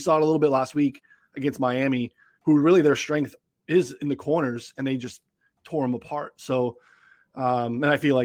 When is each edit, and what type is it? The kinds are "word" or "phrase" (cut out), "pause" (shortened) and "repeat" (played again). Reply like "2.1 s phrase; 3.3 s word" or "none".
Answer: none